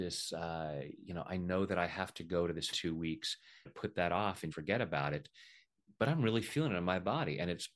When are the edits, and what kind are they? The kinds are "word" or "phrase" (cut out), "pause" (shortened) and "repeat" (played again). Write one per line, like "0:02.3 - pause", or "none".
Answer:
0:02.7 - phrase
0:03.7 - phrase
0:04.5 - word